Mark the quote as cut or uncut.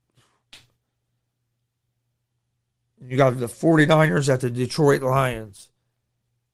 uncut